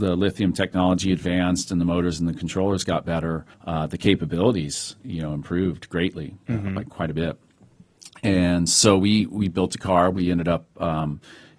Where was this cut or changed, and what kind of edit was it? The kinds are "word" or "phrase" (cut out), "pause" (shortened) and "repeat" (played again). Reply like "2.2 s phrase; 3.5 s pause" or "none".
3.5 s pause

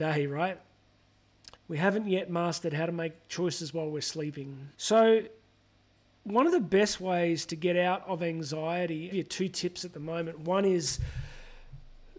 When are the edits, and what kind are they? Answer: 1.6 s pause; 4.7 s pause; 9.1 s phrase

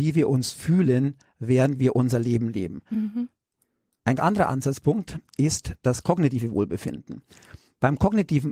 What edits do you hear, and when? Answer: 4.2 s word

